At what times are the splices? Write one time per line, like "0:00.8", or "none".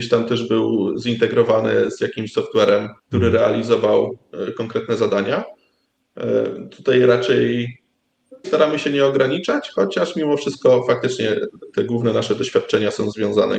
0:03.0
0:08.4